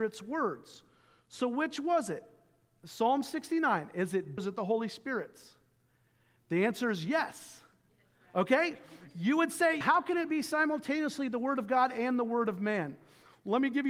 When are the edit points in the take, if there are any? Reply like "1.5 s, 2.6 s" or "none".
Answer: 4.4 s, 9.8 s